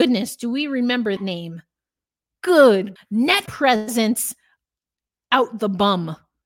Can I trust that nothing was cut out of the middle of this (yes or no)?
no